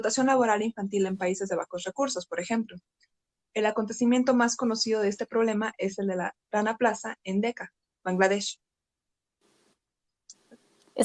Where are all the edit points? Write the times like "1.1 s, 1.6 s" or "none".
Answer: none